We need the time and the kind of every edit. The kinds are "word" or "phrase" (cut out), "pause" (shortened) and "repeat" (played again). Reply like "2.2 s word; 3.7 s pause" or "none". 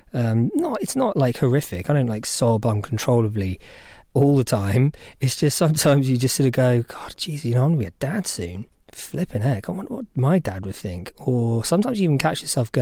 8.7 s pause